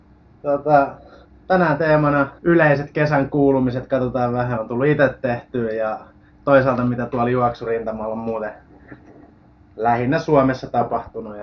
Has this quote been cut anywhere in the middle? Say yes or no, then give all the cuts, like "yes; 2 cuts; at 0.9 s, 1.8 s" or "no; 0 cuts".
yes; 2 cuts; at 2.4 s, 4.6 s